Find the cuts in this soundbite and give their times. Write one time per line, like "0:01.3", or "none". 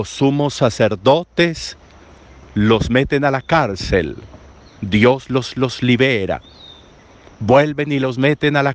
0:05.5